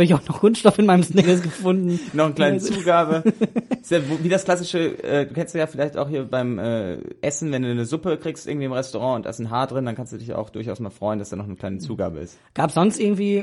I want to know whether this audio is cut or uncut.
uncut